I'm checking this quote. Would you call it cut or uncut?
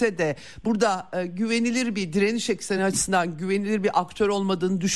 uncut